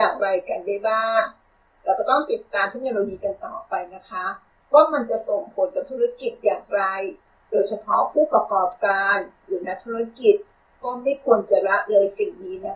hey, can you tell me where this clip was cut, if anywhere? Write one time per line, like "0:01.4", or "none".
none